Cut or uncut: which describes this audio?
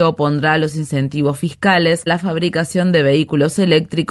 cut